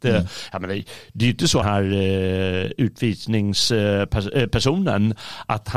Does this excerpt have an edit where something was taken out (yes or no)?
yes